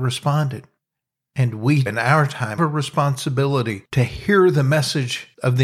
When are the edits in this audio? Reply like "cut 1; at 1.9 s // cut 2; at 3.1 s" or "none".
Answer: cut 1; at 1.9 s // cut 2; at 2.6 s